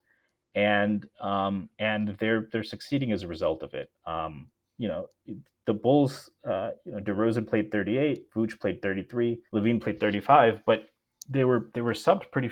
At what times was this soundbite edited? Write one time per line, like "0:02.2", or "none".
0:01.7
0:05.6
0:09.5